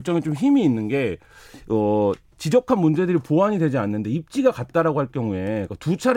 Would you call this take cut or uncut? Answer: uncut